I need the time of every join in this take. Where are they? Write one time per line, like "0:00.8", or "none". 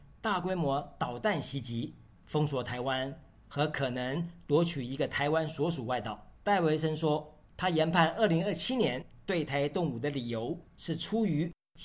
0:06.4
0:07.5
0:10.7